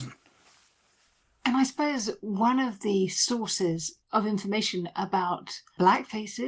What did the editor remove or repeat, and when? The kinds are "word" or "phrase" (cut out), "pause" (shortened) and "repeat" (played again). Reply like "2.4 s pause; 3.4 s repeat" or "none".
4.0 s pause